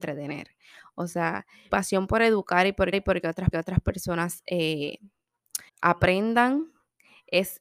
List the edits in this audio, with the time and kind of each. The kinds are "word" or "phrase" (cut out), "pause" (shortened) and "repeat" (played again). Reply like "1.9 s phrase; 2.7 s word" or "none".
1.7 s word; 2.9 s repeat; 3.5 s repeat; 5.7 s pause